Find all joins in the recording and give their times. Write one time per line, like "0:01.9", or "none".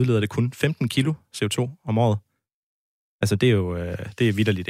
none